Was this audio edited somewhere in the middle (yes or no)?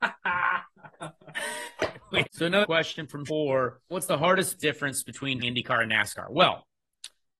yes